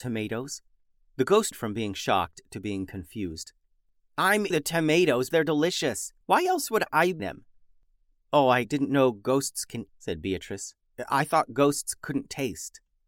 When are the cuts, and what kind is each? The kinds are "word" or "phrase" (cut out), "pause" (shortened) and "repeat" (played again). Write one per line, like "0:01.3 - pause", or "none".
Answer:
0:00.9 - pause
0:01.5 - word
0:04.5 - word
0:05.3 - word
0:06.2 - pause
0:07.2 - word
0:08.6 - phrase
0:09.9 - phrase